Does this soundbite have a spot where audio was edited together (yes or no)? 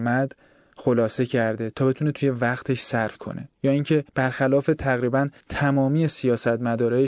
yes